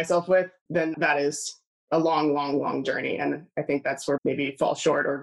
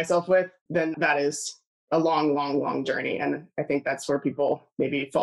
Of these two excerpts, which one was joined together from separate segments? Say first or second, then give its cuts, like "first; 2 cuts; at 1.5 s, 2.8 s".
first; 1 cut; at 4.2 s